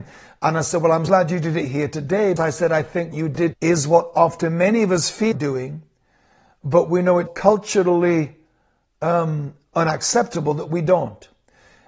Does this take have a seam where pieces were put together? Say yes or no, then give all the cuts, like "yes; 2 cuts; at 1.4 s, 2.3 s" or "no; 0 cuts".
yes; 6 cuts; at 1.1 s, 2.4 s, 3.1 s, 3.5 s, 5.3 s, 7.3 s